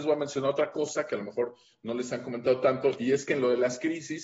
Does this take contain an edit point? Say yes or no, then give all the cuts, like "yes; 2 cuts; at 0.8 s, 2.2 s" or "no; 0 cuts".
no; 0 cuts